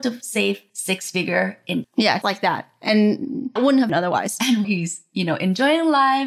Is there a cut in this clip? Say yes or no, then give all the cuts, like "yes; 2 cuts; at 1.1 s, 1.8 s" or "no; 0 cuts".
yes; 5 cuts; at 1.8 s, 2.2 s, 3.6 s, 3.9 s, 4.6 s